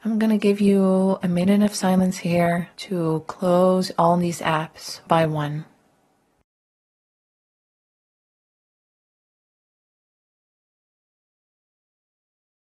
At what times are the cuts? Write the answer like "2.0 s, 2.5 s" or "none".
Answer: 2.7 s, 5.1 s